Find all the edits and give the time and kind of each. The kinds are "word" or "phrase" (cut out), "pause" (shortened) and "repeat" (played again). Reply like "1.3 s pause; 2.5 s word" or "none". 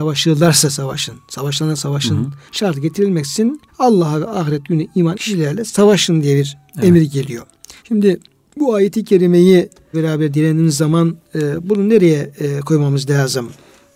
2.5 s pause; 3.7 s pause; 5.1 s word; 7.8 s pause; 9.9 s phrase